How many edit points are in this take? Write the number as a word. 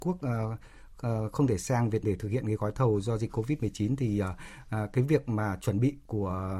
one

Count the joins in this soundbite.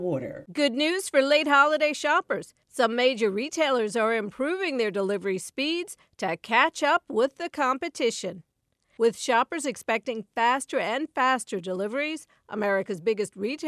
zero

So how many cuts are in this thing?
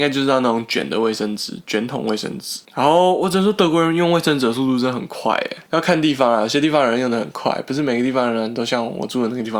two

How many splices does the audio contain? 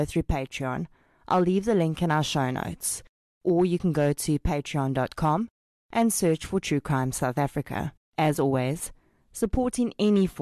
one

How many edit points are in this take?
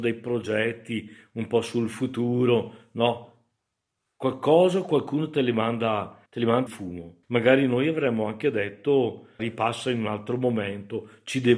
four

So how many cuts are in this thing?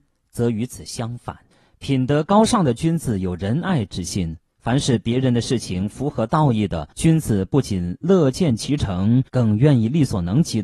three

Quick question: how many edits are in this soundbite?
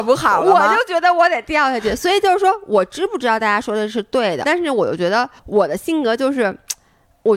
two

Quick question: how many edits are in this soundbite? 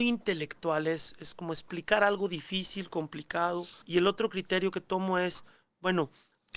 one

